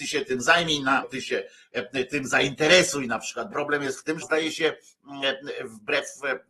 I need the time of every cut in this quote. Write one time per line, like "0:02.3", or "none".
0:01.0
0:03.5
0:04.2